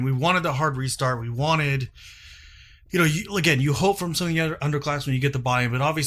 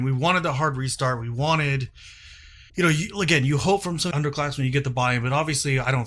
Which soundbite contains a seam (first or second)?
second